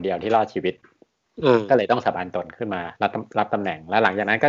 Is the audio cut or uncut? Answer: cut